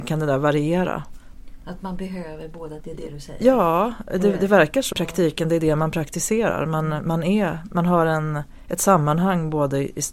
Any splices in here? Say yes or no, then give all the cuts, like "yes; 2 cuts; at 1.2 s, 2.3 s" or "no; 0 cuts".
yes; 2 cuts; at 2.8 s, 4.9 s